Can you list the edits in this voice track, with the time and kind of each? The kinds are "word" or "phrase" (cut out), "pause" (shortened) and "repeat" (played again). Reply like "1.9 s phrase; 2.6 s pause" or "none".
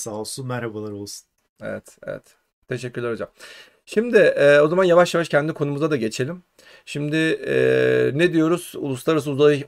none